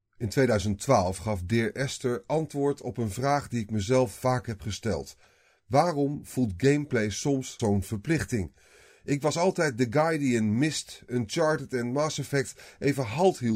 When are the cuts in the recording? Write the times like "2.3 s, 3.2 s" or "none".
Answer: 7.6 s